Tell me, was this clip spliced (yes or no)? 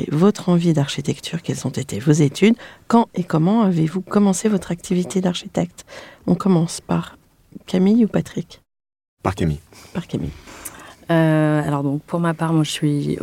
no